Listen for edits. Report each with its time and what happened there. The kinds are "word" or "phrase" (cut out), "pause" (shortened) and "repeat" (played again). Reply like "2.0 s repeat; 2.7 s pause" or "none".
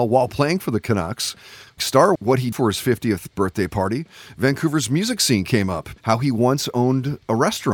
1.8 s word; 2.2 s word; 2.5 s word; 6.0 s pause